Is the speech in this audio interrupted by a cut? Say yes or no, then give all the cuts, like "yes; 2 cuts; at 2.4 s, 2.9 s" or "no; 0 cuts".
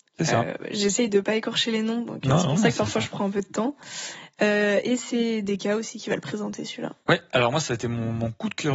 yes; 1 cut; at 7.0 s